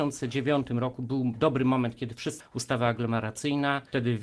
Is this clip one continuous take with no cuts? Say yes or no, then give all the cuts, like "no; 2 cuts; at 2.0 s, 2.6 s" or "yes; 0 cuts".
no; 1 cut; at 2.4 s